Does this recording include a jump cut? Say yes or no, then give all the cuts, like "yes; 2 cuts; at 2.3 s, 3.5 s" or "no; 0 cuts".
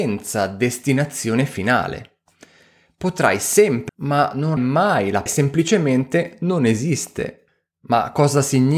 yes; 3 cuts; at 3.9 s, 4.6 s, 5.3 s